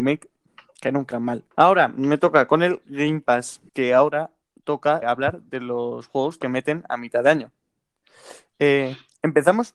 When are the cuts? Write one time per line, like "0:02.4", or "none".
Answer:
0:01.1
0:01.5
0:03.7
0:05.0